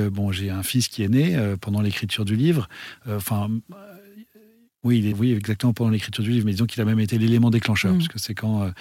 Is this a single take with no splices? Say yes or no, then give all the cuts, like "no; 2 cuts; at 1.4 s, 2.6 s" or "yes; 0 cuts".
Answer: no; 1 cut; at 5.1 s